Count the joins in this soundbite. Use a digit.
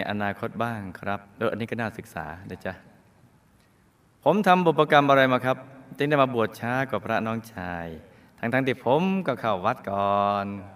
0